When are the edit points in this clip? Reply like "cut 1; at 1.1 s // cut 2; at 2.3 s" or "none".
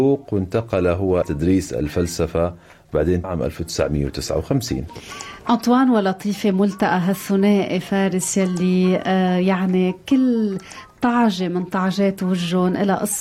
cut 1; at 1.2 s // cut 2; at 3.2 s